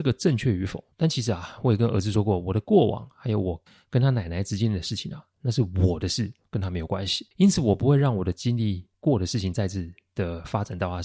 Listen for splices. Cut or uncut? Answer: cut